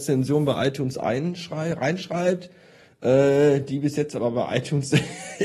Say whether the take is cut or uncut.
uncut